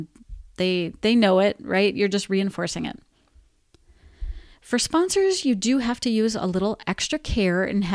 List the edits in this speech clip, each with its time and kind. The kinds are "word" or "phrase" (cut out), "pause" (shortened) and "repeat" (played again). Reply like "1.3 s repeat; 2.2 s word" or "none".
none